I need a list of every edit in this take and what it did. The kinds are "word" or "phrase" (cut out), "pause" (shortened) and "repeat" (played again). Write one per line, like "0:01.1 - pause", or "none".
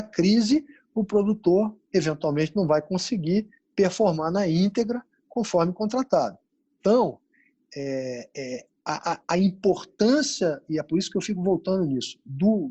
none